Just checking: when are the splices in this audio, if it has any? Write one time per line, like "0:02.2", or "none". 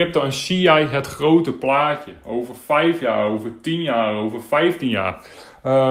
none